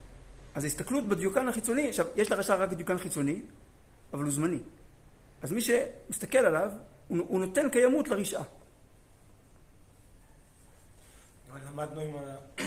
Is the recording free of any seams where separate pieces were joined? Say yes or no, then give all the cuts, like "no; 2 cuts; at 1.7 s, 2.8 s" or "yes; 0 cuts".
yes; 0 cuts